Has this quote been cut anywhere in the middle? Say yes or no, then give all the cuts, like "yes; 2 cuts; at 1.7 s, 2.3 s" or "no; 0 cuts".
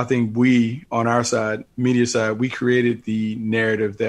no; 0 cuts